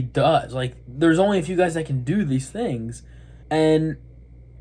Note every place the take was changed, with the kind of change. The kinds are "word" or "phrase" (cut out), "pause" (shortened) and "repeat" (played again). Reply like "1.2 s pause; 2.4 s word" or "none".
3.4 s pause